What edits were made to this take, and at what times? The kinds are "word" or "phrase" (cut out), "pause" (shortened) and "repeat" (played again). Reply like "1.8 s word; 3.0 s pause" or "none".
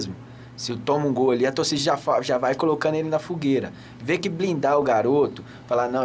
none